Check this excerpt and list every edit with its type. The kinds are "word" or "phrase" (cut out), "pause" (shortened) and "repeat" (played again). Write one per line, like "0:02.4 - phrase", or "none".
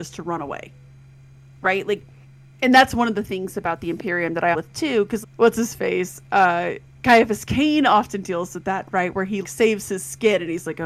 0:04.5 - phrase
0:05.2 - word
0:09.4 - word